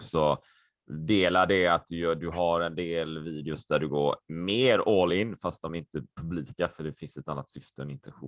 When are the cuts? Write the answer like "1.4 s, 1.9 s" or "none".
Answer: none

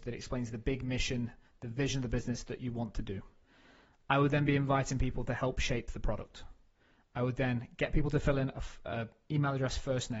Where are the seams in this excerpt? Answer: none

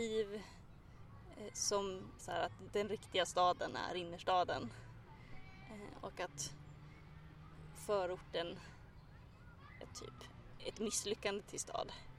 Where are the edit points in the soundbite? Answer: 2.2 s, 9.8 s

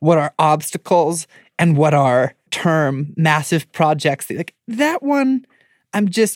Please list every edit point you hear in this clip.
2.5 s

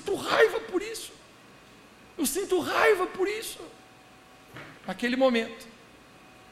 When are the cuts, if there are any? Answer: 4.8 s

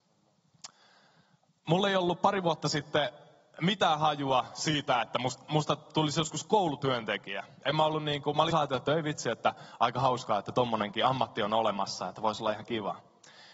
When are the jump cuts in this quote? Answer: 8.5 s

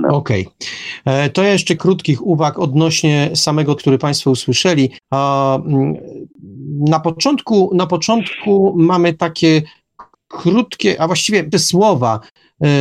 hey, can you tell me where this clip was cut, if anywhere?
1.8 s, 3.8 s, 5.0 s, 10.1 s, 11.5 s

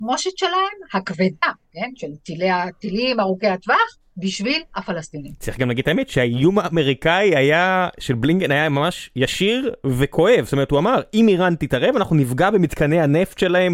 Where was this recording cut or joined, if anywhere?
4.0 s

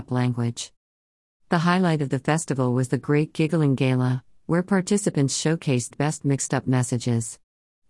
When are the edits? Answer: 5.9 s

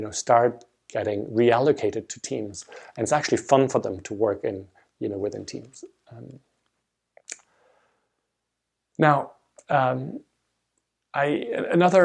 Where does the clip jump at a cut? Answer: none

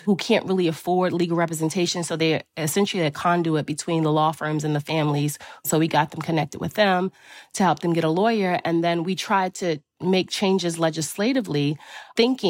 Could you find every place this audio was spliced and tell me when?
none

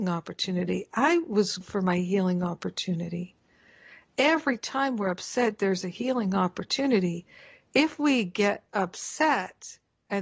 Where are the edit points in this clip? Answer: 1.6 s

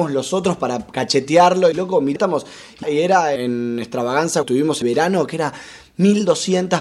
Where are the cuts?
1.7 s, 2.2 s, 2.8 s, 3.4 s, 4.4 s, 4.8 s

